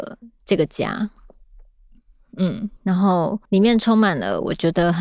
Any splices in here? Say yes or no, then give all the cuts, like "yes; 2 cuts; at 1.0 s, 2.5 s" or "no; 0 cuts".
yes; 2 cuts; at 2.8 s, 3.4 s